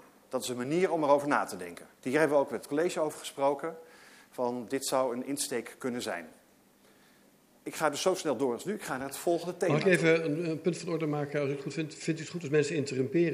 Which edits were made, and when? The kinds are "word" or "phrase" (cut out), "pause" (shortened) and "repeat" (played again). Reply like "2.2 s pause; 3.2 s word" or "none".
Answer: 2.0 s pause